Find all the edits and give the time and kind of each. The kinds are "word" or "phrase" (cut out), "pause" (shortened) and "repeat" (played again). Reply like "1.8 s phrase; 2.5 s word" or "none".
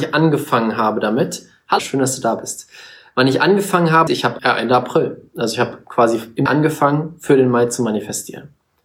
1.8 s word; 4.1 s word; 4.4 s word; 6.5 s word